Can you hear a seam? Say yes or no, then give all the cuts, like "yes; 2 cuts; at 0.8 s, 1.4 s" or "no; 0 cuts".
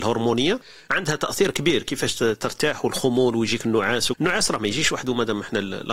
yes; 1 cut; at 4.1 s